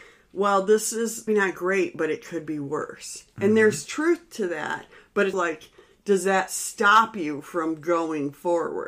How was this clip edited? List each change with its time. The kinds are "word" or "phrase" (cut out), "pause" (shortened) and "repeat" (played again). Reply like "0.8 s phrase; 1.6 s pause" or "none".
1.3 s word; 5.3 s word